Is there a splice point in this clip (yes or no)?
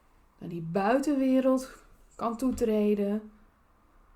no